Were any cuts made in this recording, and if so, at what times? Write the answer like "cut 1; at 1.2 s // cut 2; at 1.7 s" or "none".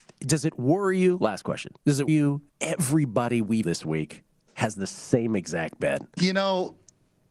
cut 1; at 1.8 s // cut 2; at 2.1 s // cut 3; at 2.5 s // cut 4; at 3.6 s